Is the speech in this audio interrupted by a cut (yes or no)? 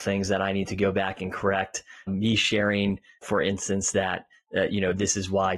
no